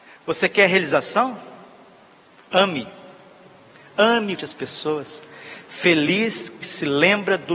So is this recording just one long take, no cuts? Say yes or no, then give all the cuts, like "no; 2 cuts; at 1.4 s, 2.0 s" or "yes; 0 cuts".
no; 2 cuts; at 4.4 s, 6.6 s